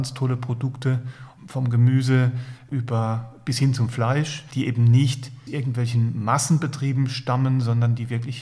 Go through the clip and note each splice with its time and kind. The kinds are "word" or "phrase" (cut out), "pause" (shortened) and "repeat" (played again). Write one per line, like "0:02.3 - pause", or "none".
0:01.4 - word
0:04.5 - word
0:05.5 - word